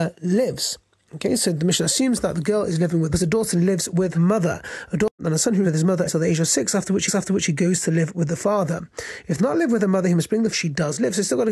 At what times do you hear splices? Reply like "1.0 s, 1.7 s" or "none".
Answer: 3.1 s, 4.1 s, 5.6 s, 6.1 s, 7.1 s, 9.4 s, 10.5 s